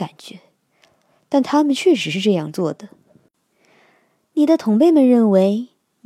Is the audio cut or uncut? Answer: uncut